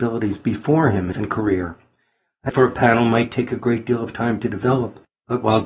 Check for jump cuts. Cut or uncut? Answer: cut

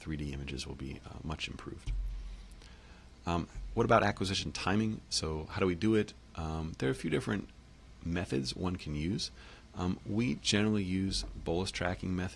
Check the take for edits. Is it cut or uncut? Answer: uncut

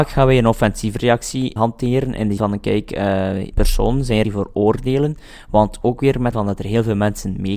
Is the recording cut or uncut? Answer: cut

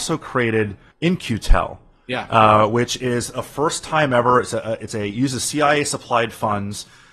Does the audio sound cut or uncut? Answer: cut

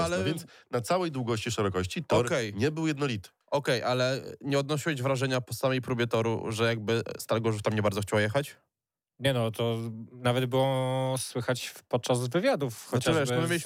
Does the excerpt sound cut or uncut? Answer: uncut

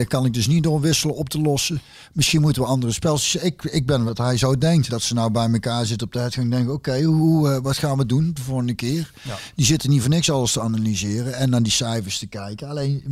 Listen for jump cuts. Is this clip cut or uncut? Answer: cut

